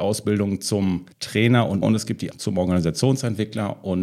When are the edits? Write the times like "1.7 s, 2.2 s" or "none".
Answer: 1.1 s, 1.8 s, 2.3 s